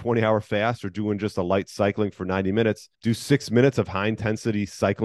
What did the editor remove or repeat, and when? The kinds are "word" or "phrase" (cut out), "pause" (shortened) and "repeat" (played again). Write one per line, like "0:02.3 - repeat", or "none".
0:02.9 - pause